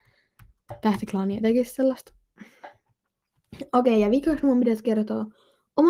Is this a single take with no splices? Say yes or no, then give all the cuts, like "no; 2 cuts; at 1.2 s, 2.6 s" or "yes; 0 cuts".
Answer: yes; 0 cuts